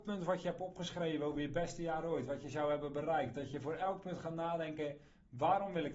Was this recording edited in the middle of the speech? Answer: no; 0 cuts

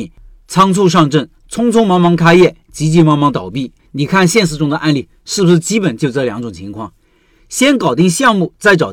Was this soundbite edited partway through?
yes; 1 cut; at 3.8 s

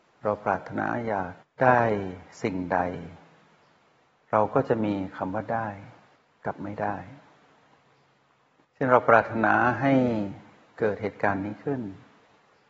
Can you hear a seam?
no; 0 cuts

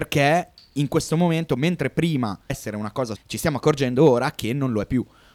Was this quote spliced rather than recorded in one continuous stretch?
yes; 2 cuts; at 2.5 s, 3.2 s

